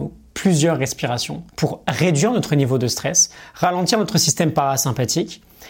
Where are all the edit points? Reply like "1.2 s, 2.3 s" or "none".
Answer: 1.5 s